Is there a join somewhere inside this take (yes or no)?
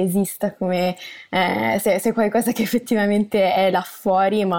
no